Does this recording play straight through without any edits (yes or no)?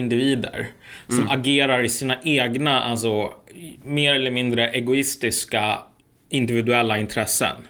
yes